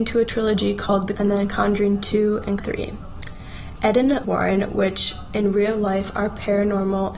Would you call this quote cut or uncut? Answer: cut